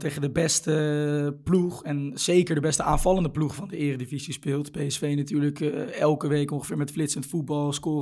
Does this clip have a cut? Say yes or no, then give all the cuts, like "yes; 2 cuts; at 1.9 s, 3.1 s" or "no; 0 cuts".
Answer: no; 0 cuts